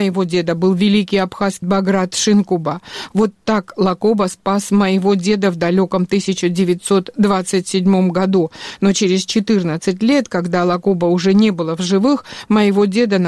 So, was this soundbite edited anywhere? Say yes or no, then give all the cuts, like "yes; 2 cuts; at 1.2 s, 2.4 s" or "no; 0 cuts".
yes; 1 cut; at 1.6 s